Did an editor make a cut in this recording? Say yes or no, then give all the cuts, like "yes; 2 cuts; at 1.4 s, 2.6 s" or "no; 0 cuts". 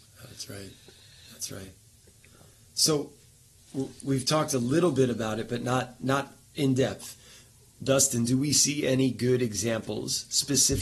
no; 0 cuts